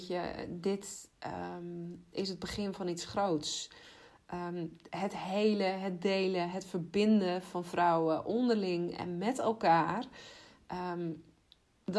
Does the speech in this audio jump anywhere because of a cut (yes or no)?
no